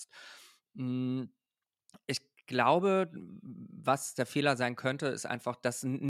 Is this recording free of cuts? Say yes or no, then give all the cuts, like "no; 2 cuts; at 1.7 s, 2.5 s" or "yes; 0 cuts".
yes; 0 cuts